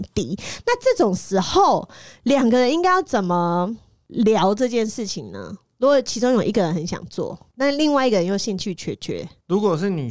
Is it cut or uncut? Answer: uncut